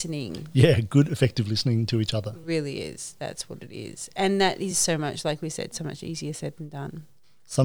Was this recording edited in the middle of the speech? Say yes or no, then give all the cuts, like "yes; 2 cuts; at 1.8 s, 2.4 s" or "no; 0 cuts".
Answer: no; 0 cuts